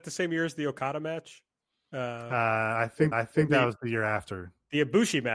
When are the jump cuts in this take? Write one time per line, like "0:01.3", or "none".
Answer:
0:03.1